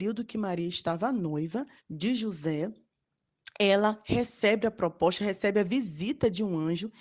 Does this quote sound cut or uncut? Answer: cut